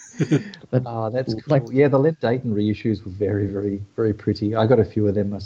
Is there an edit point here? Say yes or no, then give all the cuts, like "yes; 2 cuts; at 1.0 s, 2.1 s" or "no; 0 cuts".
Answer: no; 0 cuts